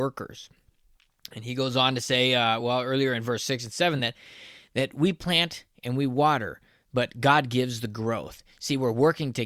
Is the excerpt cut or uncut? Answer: uncut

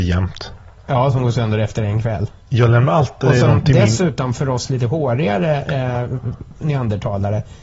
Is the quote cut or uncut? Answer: uncut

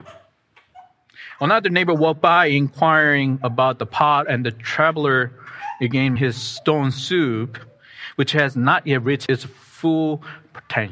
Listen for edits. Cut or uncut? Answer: cut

